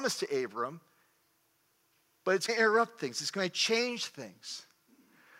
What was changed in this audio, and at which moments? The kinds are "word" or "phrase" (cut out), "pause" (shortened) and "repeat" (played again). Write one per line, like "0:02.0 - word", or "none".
0:02.5 - word